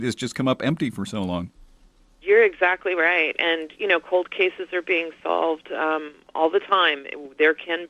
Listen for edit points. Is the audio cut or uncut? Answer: uncut